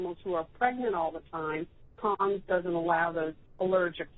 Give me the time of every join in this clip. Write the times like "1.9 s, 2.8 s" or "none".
none